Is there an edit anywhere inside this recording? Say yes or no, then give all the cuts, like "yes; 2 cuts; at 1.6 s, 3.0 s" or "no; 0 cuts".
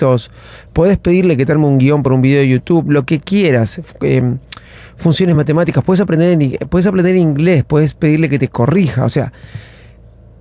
no; 0 cuts